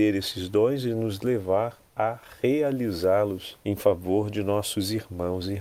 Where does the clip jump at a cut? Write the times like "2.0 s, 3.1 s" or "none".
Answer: 3.6 s